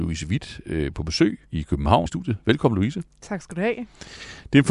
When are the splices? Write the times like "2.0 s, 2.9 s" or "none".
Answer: 1.5 s, 2.1 s